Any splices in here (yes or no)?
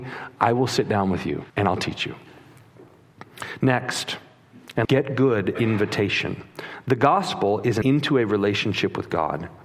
yes